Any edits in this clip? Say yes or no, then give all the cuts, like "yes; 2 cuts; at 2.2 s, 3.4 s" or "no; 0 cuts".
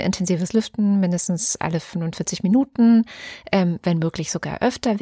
no; 0 cuts